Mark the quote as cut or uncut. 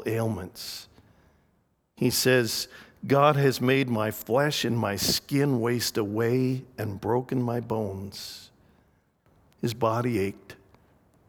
uncut